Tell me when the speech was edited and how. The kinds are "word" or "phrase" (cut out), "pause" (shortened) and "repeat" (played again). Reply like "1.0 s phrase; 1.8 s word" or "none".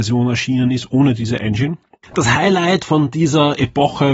none